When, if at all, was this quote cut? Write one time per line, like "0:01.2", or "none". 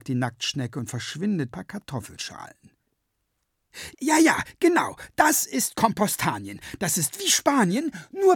0:01.5
0:03.9